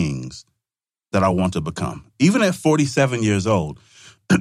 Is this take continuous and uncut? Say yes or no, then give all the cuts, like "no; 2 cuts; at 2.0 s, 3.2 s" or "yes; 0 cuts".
yes; 0 cuts